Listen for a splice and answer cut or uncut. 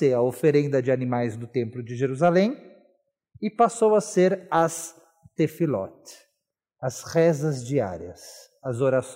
uncut